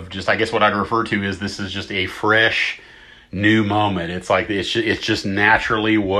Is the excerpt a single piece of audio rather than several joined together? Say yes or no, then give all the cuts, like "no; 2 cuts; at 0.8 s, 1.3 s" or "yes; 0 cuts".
yes; 0 cuts